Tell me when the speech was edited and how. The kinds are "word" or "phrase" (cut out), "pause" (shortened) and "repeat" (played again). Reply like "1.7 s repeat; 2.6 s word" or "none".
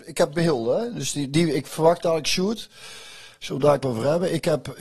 3.8 s word